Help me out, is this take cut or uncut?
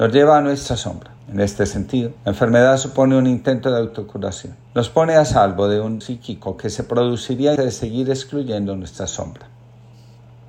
cut